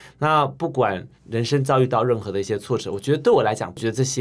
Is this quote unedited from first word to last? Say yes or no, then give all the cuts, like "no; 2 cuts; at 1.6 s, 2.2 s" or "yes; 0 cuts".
no; 1 cut; at 1.2 s